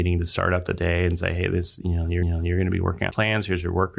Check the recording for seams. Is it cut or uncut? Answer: cut